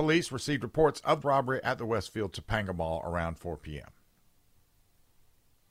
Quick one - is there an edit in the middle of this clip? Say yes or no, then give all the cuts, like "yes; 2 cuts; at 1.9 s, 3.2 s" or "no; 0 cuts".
yes; 1 cut; at 1.2 s